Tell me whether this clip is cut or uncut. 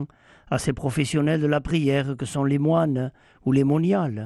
uncut